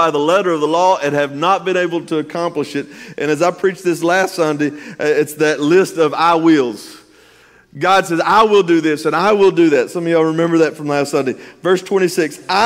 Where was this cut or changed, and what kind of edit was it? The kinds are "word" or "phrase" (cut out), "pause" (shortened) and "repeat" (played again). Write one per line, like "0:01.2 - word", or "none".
none